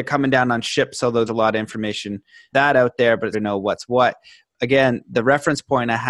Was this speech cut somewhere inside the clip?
yes; 4 cuts; at 1.3 s, 2.5 s, 3.3 s, 4.5 s

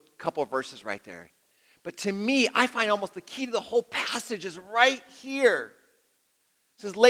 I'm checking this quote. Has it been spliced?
no; 0 cuts

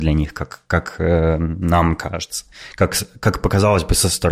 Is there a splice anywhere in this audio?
no; 0 cuts

